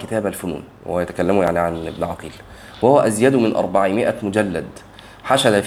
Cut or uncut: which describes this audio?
uncut